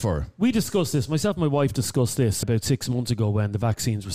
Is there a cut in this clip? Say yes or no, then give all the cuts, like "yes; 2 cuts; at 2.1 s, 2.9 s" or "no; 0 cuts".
yes; 1 cut; at 2.4 s